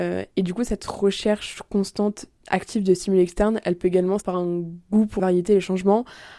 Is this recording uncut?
no; 2 cuts; at 4.2 s, 5.2 s

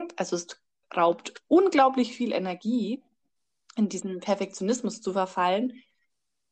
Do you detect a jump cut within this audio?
no; 0 cuts

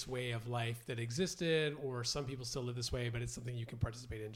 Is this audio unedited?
yes; 0 cuts

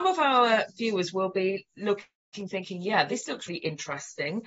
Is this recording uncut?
no; 1 cut; at 3.5 s

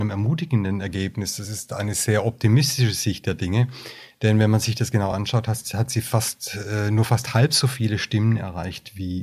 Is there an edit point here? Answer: no; 0 cuts

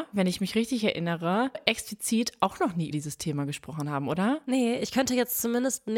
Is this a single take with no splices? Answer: no; 2 cuts; at 1.5 s, 2.9 s

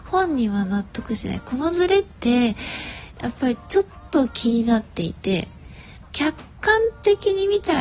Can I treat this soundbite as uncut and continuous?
no; 1 cut; at 6.0 s

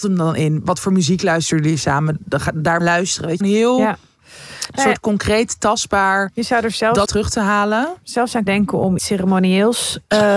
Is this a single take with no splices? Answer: no; 5 cuts; at 2.8 s, 3.4 s, 7.1 s, 8.5 s, 9.0 s

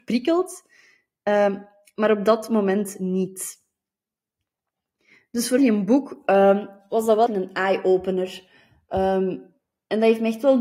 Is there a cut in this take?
yes; 2 cuts; at 5.6 s, 7.3 s

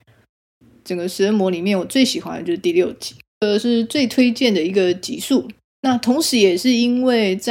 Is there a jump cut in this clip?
no; 0 cuts

